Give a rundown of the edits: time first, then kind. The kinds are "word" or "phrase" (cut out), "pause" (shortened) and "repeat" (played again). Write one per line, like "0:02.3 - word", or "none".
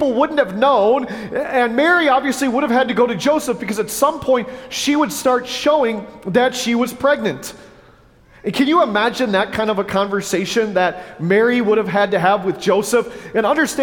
none